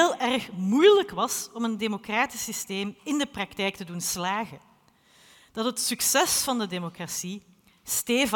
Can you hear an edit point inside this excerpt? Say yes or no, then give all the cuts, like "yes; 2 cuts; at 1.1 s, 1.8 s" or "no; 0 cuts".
no; 0 cuts